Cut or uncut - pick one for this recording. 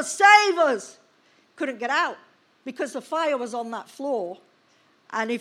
uncut